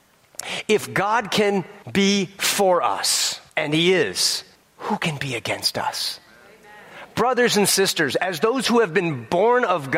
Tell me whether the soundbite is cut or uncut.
cut